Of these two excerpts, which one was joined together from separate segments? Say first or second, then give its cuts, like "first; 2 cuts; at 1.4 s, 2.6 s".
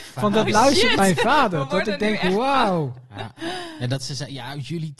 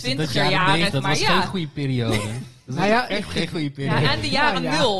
second; 1 cut; at 0.9 s